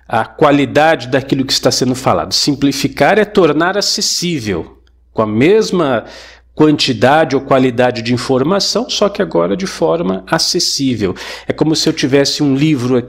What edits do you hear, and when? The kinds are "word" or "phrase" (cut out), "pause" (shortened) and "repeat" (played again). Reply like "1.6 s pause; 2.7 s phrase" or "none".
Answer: none